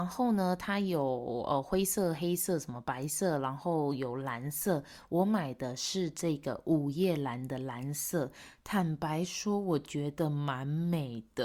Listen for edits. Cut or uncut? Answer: uncut